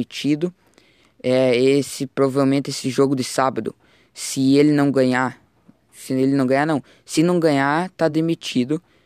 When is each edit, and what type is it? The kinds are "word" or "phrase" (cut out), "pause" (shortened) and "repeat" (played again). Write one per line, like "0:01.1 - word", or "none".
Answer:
none